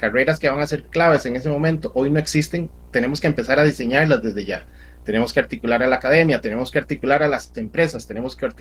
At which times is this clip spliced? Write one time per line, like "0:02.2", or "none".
none